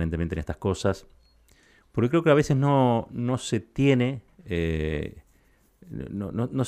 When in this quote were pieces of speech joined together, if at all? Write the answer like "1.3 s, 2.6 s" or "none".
none